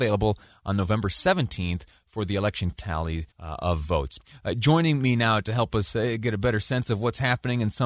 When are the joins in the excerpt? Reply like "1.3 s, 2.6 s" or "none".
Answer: 2.7 s, 3.3 s